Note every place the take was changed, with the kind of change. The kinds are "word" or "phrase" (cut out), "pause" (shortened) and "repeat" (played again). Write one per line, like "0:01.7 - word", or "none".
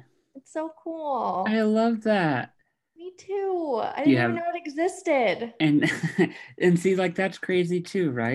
none

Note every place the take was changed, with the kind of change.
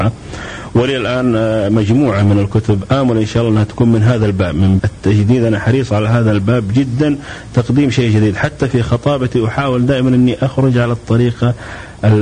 0:04.8 - word

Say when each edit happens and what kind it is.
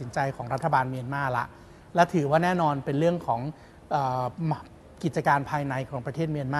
none

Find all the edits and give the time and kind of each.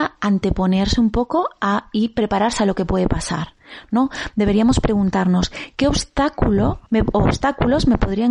0:06.9 - pause

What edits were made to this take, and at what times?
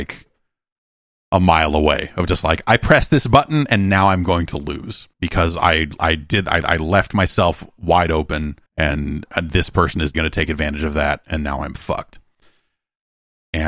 0:05.1 - pause
0:06.6 - repeat
0:08.7 - pause
0:10.1 - word

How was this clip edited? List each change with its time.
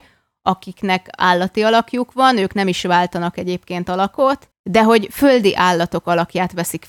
0:04.5 - pause

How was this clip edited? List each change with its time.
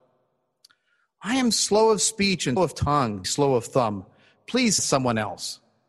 0:02.6 - word
0:03.2 - word
0:04.8 - word

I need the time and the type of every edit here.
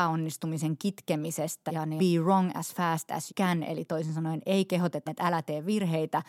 0:01.7 - word
0:02.0 - phrase
0:03.3 - word
0:05.1 - word

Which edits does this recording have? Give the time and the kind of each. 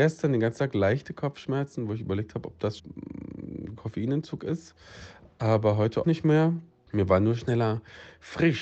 0:02.8 - word
0:06.0 - word

